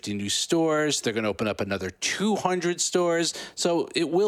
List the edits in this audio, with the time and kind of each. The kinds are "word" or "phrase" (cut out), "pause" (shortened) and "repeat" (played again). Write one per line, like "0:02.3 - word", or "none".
none